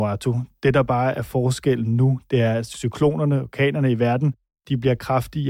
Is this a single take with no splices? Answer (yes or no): yes